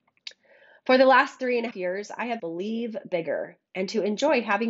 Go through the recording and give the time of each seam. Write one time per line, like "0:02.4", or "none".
0:01.7
0:02.4
0:03.7